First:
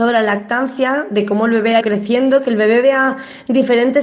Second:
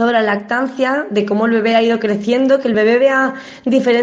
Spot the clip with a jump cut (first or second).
first